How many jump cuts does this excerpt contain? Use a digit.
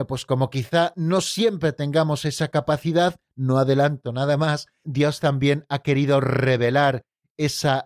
1